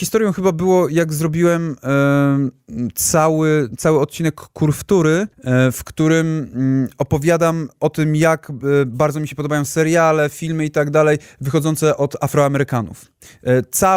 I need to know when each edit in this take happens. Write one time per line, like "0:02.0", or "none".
0:05.3